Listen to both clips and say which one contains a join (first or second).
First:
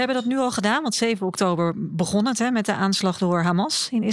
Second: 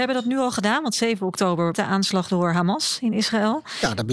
second